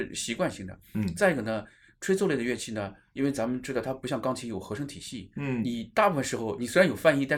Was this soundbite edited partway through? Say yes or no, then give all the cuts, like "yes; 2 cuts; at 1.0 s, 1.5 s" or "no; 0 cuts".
no; 0 cuts